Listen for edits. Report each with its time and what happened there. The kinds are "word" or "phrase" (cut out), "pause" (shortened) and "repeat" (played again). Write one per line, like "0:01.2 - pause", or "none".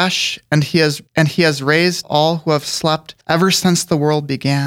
0:01.1 - pause
0:02.0 - word
0:03.2 - pause